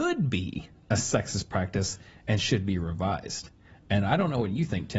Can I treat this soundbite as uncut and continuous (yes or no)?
yes